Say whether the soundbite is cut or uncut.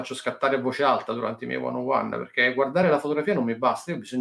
uncut